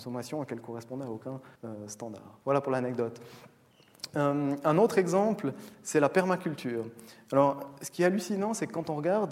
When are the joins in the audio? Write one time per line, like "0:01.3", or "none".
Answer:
0:01.6
0:02.4